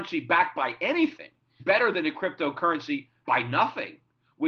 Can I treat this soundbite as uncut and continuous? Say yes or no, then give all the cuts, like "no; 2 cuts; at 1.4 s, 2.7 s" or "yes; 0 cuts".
no; 2 cuts; at 1.6 s, 3.2 s